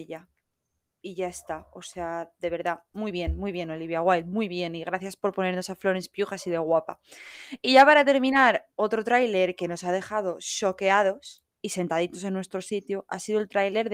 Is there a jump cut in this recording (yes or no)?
yes